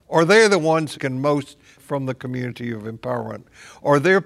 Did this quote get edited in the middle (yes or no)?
yes